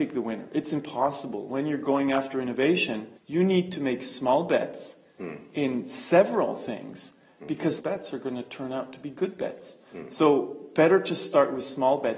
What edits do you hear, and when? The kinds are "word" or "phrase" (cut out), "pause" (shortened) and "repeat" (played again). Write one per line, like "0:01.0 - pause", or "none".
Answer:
0:03.2 - pause
0:07.8 - phrase